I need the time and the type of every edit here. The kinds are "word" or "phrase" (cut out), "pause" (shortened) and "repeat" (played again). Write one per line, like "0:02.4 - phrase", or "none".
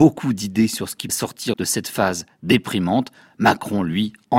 0:01.1 - word
0:01.5 - word